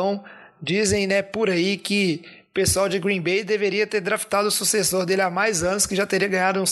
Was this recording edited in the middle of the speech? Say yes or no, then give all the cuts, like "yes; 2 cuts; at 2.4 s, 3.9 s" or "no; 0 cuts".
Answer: no; 0 cuts